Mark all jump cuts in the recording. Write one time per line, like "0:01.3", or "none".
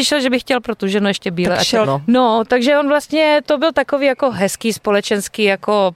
0:01.8
0:03.4